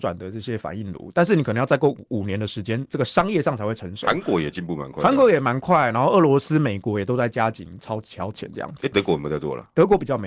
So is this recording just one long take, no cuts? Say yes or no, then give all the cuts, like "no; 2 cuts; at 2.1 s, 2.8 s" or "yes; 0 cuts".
yes; 0 cuts